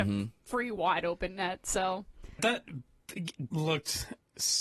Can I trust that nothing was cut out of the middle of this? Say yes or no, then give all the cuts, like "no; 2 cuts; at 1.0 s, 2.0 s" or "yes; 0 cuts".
no; 2 cuts; at 2.4 s, 3.5 s